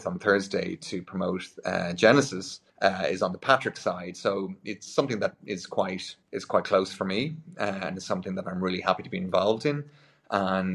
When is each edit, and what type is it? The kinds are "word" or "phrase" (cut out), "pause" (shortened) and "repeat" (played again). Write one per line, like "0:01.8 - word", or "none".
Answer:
0:02.7 - pause
0:06.2 - pause